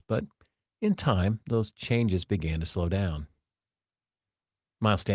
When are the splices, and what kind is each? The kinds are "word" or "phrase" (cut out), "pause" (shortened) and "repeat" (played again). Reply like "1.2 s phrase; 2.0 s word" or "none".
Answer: none